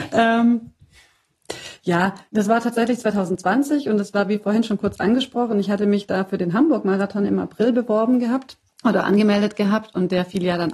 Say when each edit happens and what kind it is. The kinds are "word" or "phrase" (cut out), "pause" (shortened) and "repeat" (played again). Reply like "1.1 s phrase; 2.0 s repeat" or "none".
2.3 s pause; 8.7 s pause